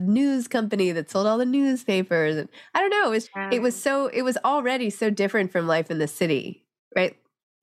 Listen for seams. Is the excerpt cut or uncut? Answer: cut